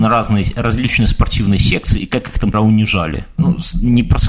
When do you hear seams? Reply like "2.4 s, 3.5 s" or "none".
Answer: 2.5 s